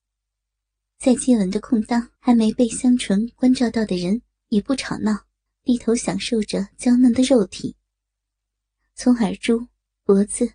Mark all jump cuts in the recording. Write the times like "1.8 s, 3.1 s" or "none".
2.2 s, 5.5 s